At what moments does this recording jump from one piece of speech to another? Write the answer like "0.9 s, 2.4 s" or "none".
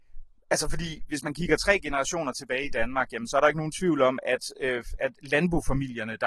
none